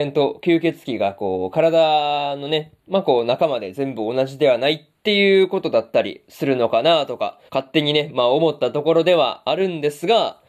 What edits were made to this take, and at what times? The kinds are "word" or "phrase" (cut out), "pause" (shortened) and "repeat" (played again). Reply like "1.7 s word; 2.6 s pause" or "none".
7.5 s pause

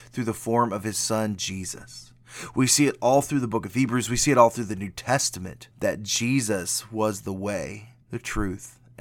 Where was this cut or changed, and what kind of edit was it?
5.7 s pause; 8.0 s pause

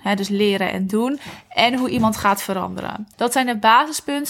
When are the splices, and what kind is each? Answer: 3.1 s pause

